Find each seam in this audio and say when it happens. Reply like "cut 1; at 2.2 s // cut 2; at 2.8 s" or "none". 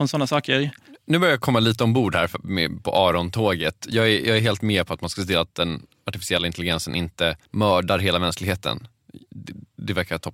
cut 1; at 7.4 s